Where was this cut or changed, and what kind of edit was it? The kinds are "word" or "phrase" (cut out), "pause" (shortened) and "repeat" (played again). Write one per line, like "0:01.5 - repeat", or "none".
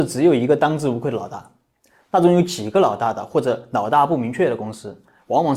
none